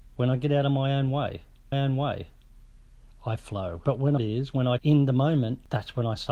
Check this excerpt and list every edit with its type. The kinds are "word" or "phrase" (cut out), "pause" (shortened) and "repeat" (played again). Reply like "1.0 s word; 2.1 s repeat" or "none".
1.7 s repeat; 4.2 s phrase; 4.8 s phrase